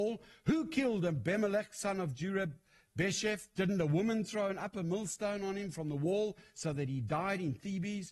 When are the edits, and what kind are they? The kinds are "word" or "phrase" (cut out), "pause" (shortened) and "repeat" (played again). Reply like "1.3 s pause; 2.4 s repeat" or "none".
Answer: none